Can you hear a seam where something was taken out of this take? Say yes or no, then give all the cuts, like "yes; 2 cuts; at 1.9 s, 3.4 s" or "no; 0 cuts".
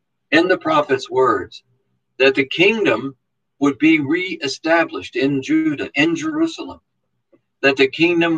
no; 0 cuts